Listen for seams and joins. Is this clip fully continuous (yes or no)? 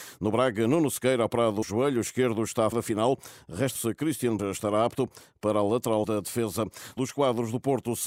no